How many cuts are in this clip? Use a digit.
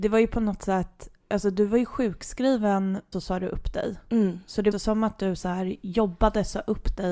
3